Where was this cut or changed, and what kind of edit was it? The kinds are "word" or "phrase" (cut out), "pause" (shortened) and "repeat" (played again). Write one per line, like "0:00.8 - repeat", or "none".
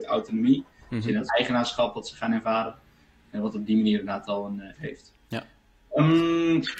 0:01.3 - word
0:04.7 - word

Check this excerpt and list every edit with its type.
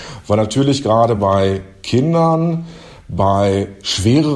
none

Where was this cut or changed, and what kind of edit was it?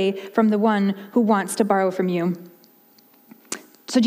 none

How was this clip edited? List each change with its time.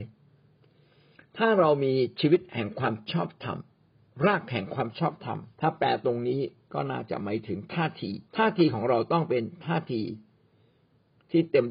0:05.5 - pause
0:08.3 - pause

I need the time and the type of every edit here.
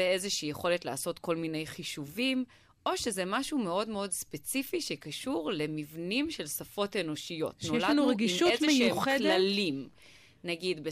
none

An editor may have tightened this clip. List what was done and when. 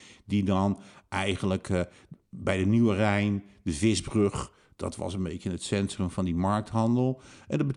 none

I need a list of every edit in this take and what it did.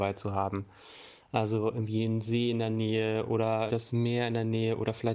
0:03.7 - word

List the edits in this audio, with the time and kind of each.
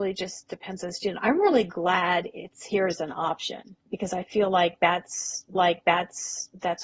0:03.8 - pause
0:05.5 - repeat

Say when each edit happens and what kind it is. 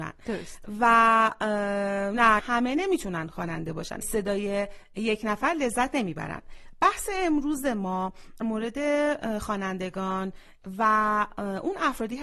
0:02.4 - phrase
0:04.0 - phrase
0:08.4 - word

